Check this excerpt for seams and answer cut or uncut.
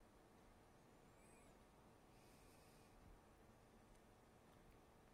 uncut